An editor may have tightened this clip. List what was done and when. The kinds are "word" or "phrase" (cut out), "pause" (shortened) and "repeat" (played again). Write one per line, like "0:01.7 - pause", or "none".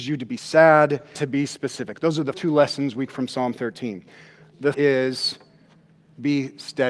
0:01.2 - word
0:02.3 - word
0:03.1 - word
0:04.7 - word